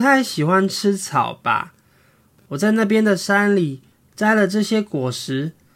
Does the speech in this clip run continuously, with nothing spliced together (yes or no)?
yes